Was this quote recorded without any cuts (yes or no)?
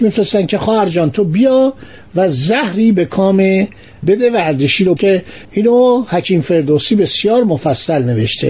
no